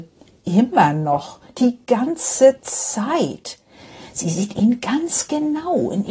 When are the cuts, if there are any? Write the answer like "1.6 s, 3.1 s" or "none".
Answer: none